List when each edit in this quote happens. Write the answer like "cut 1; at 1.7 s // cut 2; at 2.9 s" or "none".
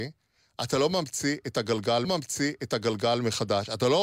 cut 1; at 2.0 s

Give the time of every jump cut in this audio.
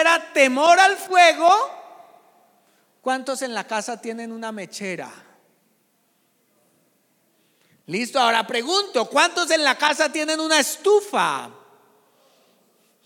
none

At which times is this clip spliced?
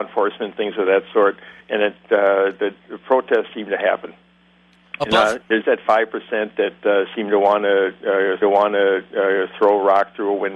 cut 1; at 1.6 s // cut 2; at 3.5 s // cut 3; at 5.6 s // cut 4; at 8.4 s

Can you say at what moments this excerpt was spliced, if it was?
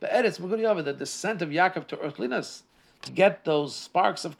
cut 1; at 3.1 s

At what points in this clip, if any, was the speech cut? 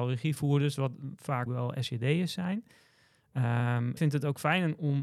cut 1; at 1.5 s // cut 2; at 4.0 s

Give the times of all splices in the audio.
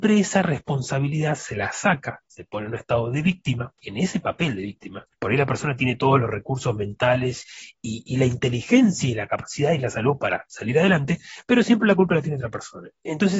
cut 1; at 3.8 s // cut 2; at 5.1 s

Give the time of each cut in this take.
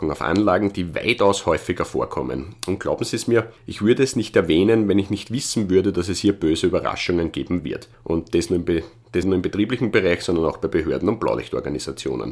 cut 1; at 3.6 s // cut 2; at 7.9 s // cut 3; at 9.2 s

